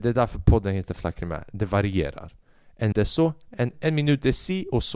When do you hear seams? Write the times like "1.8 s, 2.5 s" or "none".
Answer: 2.9 s, 3.7 s